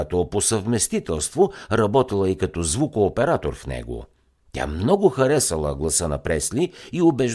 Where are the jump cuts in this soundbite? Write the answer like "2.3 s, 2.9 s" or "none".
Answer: none